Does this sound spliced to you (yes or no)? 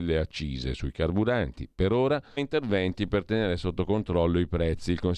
yes